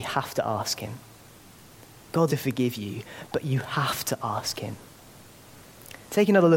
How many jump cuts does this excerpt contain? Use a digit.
1